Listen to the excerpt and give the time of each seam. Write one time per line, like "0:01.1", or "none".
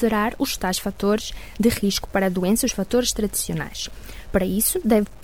none